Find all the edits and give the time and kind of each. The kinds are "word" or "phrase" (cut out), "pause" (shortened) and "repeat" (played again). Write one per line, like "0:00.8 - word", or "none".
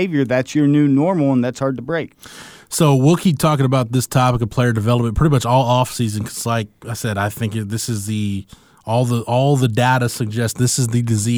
none